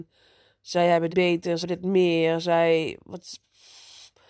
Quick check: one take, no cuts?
no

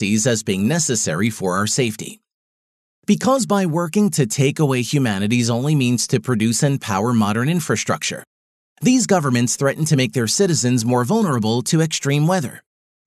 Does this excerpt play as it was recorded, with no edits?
yes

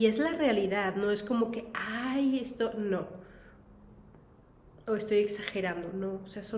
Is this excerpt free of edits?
yes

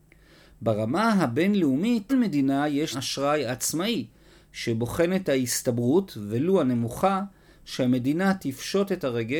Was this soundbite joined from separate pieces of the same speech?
yes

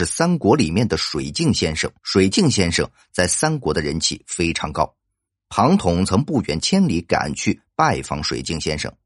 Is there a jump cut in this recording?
yes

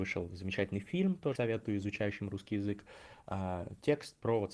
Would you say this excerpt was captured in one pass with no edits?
no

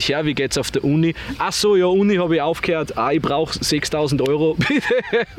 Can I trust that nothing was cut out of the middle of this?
yes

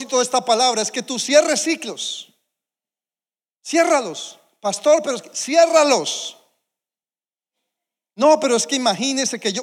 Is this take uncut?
yes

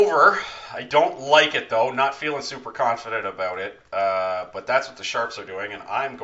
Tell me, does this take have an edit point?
no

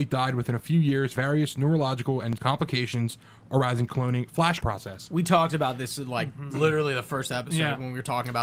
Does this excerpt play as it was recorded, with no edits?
no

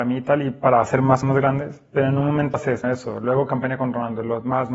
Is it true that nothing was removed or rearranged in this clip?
no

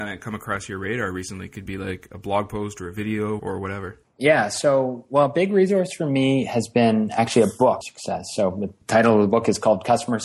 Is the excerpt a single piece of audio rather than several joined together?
no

